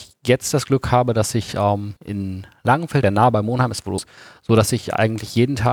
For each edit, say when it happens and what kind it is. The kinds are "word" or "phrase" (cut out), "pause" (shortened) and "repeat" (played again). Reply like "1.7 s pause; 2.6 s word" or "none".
2.0 s pause; 3.0 s phrase; 4.0 s phrase